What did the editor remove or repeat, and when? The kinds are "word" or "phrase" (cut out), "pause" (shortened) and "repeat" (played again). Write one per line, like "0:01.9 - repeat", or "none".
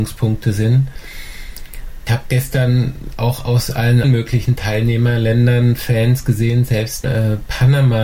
0:02.1 - word
0:04.0 - word
0:07.0 - word